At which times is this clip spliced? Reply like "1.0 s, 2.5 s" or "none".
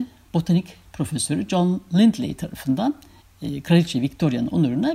none